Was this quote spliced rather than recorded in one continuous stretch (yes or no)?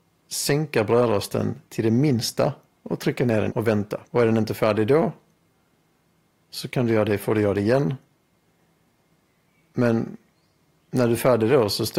yes